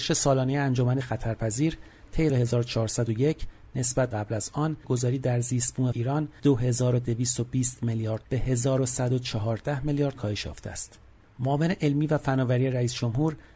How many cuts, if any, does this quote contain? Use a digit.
8